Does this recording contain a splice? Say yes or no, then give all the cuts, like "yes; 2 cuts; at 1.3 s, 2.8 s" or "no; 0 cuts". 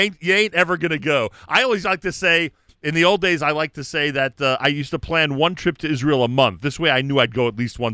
no; 0 cuts